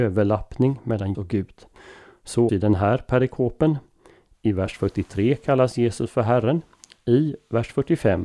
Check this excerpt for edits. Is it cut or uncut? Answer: cut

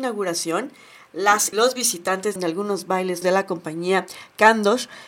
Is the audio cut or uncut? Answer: cut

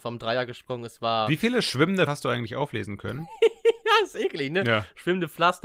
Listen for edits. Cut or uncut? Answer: cut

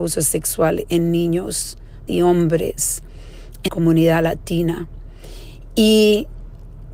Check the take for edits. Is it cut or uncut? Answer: cut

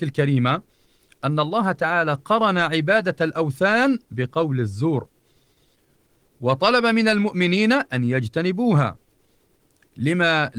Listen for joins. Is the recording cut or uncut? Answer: uncut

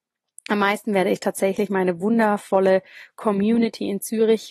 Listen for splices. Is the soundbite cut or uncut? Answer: uncut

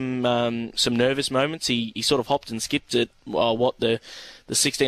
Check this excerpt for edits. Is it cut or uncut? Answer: uncut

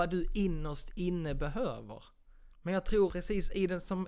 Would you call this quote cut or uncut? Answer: cut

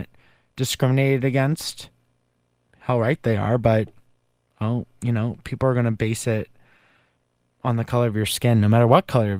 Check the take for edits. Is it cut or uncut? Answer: uncut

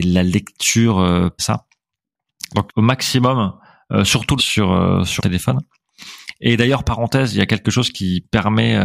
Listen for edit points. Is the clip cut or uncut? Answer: cut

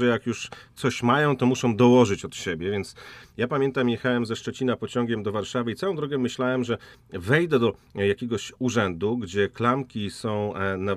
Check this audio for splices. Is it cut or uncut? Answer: uncut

